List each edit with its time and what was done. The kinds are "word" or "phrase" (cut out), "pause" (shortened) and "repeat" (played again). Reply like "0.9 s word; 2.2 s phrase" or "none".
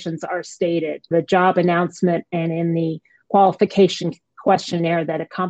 1.1 s word